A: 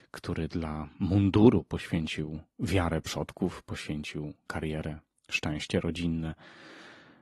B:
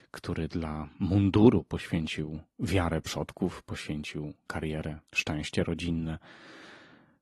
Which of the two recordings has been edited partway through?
B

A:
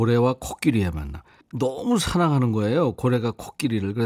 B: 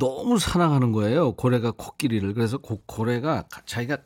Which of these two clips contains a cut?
A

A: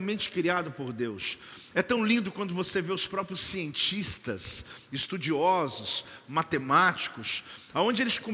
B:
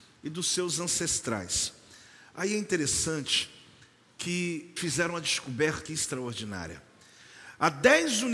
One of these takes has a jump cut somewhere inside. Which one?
B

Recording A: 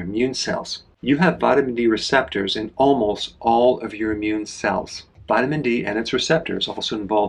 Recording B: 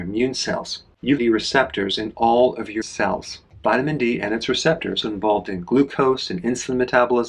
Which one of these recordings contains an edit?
B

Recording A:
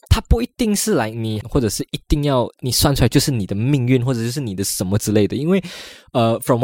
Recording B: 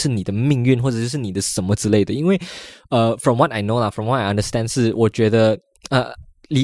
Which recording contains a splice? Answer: A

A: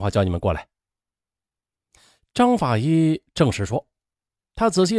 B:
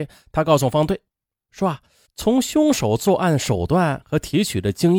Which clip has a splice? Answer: B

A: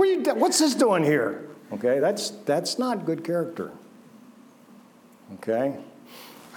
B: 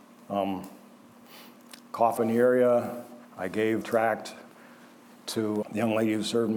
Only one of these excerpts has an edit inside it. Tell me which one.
B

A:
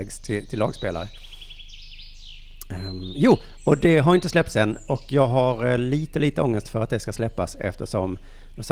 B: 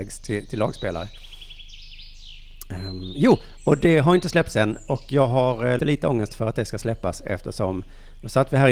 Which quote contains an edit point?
B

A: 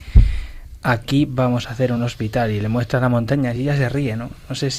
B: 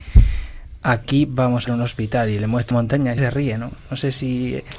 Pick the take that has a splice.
B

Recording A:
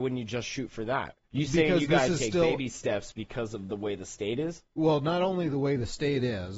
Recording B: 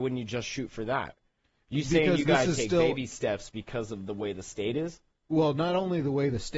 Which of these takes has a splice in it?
A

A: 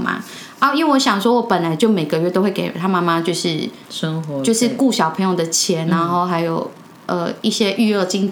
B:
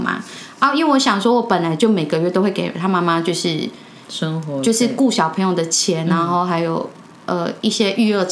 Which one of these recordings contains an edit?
A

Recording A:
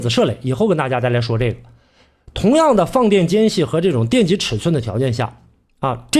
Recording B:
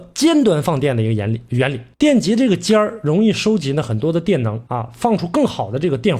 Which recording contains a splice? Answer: B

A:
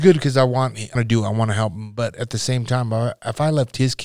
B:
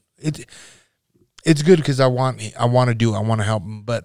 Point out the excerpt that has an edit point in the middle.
A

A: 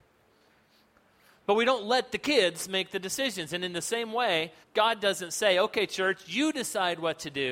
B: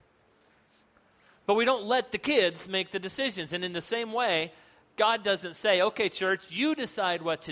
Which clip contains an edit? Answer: A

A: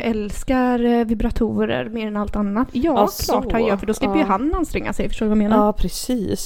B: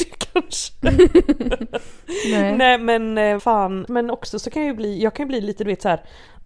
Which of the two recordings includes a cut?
B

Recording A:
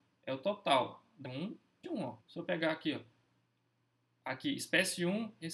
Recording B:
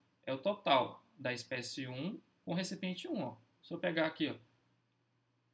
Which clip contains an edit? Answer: A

